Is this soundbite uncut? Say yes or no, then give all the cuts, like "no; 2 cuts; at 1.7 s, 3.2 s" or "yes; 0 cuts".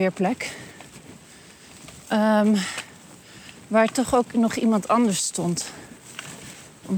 no; 1 cut; at 2.0 s